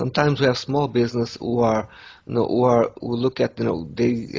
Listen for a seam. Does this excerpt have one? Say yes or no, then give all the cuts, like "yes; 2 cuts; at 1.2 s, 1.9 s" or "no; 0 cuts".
no; 0 cuts